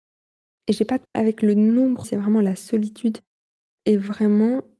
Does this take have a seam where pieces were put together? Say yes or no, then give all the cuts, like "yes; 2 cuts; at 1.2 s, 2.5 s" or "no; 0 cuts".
yes; 2 cuts; at 1.0 s, 2.0 s